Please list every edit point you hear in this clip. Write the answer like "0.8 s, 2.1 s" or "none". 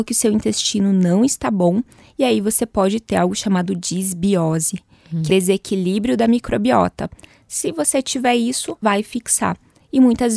5.3 s, 8.8 s